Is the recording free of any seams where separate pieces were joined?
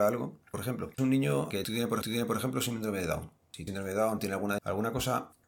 no; 5 cuts; at 1.0 s, 1.5 s, 2.0 s, 3.7 s, 4.6 s

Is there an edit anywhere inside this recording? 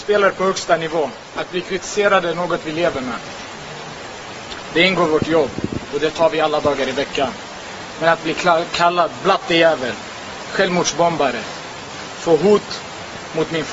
no; 0 cuts

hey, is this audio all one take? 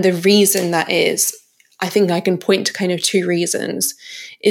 yes; 0 cuts

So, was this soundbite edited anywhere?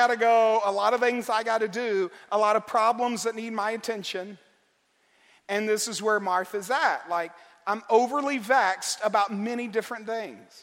no; 0 cuts

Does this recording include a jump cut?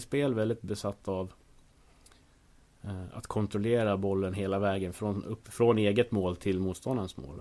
no; 0 cuts

